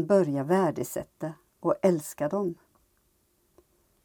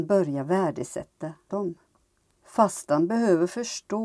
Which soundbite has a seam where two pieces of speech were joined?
second; 2 cuts; at 1.5 s, 2.2 s

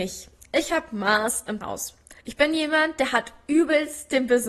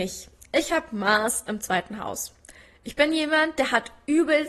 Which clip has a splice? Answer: first; 2 cuts; at 1.6 s, 2.2 s

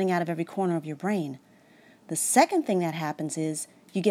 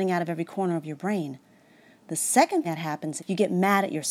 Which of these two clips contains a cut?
second; 2 cuts; at 2.6 s, 3.2 s

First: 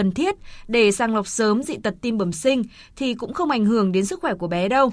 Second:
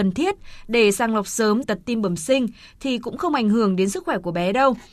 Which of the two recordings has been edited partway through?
second; 1 cut; at 1.6 s

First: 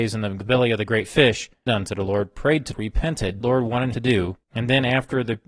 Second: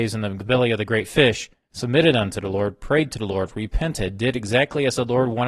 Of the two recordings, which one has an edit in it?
first; 5 cuts; at 1.7 s, 2.7 s, 3.4 s, 3.9 s, 4.4 s

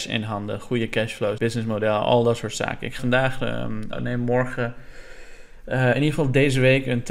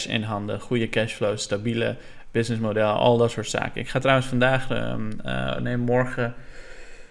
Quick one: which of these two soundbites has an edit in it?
first; 3 cuts; at 1.4 s, 3.0 s, 3.9 s

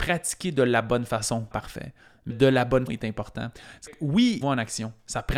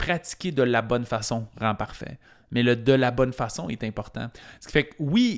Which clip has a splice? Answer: first; 5 cuts; at 1.5 s, 2.3 s, 2.9 s, 3.9 s, 4.4 s

